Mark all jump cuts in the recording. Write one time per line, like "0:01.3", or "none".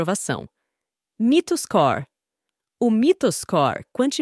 none